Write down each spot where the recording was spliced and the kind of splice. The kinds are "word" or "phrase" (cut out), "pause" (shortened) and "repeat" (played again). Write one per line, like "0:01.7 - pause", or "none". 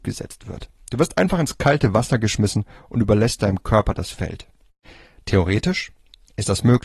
none